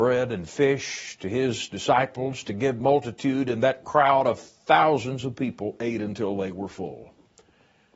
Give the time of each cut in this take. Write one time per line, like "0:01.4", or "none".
0:02.8